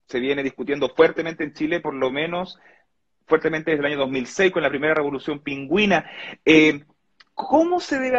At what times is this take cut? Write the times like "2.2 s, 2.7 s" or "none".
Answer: none